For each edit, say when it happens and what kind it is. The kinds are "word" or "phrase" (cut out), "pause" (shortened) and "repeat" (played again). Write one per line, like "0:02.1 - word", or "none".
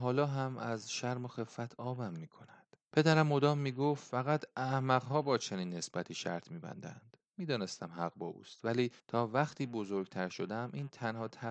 0:02.8 - pause
0:07.3 - pause
0:09.0 - pause